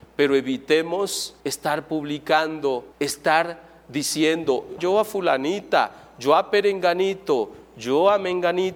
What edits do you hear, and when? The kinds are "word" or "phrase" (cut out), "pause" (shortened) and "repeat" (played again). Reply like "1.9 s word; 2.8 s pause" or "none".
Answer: 1.4 s pause; 2.9 s pause; 4.8 s word